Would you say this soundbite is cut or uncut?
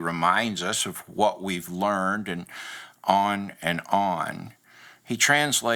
uncut